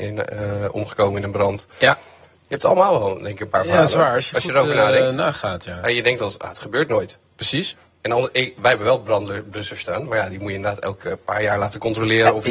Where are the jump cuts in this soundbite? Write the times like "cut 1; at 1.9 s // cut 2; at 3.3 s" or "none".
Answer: cut 1; at 9.8 s